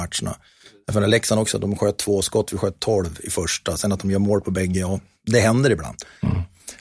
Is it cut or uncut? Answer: uncut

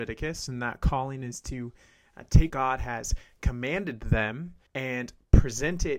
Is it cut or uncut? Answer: cut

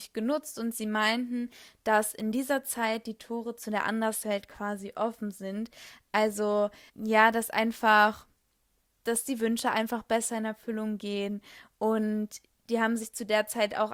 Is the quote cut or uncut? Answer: cut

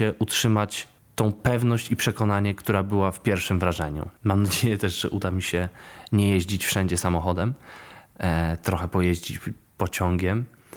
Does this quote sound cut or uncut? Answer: cut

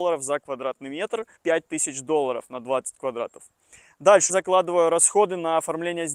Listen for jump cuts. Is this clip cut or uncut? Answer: cut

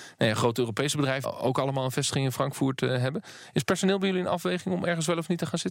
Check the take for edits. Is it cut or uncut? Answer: cut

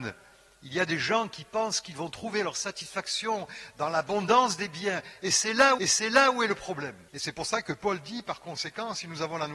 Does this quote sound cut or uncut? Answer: cut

